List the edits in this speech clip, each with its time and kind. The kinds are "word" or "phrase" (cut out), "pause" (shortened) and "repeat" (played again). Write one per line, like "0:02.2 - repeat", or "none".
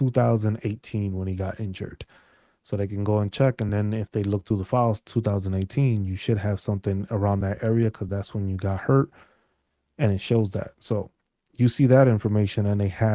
none

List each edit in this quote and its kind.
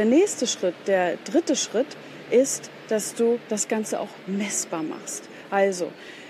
none

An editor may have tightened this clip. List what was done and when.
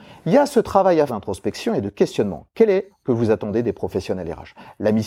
0:01.1 - word
0:02.9 - phrase

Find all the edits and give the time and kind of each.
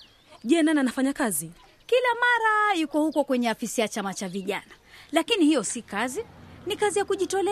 none

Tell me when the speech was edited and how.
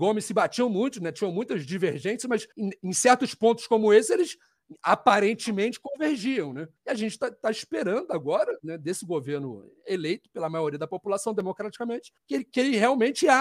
0:02.5 - pause
0:06.8 - pause
0:12.2 - pause

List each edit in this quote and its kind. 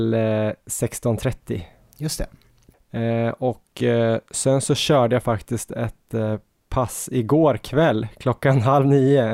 none

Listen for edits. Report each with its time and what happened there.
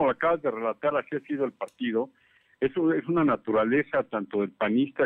none

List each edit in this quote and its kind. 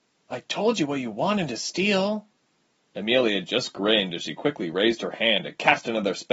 none

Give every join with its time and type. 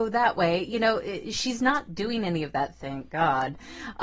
none

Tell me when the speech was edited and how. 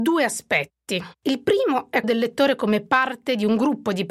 0:01.2 - pause
0:02.0 - word

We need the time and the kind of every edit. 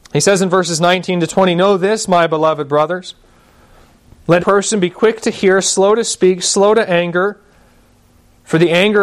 0:04.4 - word

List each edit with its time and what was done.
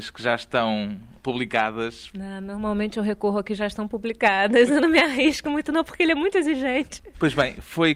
none

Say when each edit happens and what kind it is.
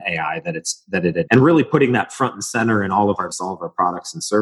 0:01.3 - word
0:03.3 - word

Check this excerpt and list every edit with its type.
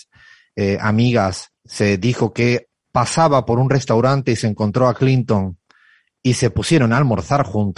0:01.6 - pause

